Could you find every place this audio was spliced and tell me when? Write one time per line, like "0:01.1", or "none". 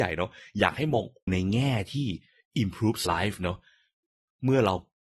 0:01.3
0:03.1